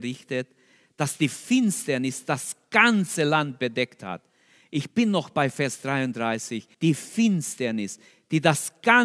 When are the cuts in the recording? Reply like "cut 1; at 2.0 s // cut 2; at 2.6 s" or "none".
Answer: cut 1; at 6.7 s